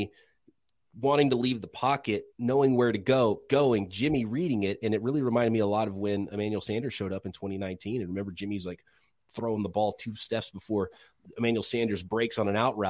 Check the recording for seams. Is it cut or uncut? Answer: cut